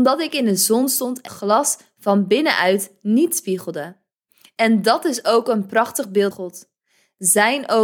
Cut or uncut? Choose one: cut